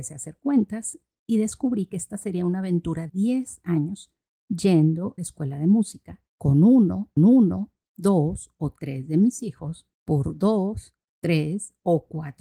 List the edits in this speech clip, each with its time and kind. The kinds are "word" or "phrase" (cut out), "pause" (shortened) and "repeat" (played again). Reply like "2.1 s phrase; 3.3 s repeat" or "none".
3.1 s word; 5.2 s phrase; 6.3 s pause; 7.2 s repeat; 9.9 s pause